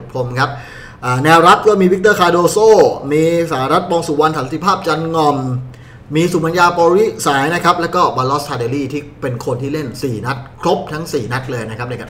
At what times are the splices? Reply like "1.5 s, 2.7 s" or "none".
10.5 s